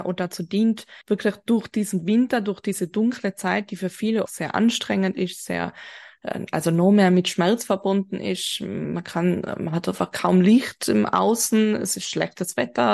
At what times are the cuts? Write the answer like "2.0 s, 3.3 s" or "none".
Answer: 1.0 s, 4.3 s